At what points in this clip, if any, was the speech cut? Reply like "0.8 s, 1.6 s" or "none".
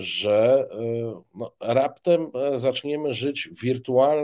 none

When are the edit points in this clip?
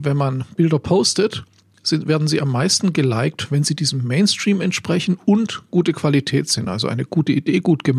none

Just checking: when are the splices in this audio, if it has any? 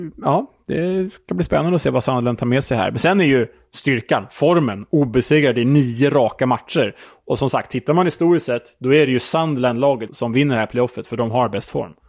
10.1 s

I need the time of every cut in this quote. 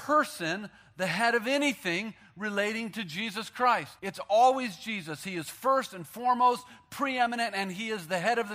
4.0 s

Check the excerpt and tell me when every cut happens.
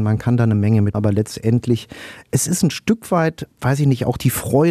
0.9 s, 3.5 s

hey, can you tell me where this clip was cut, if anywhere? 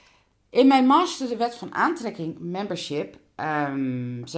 none

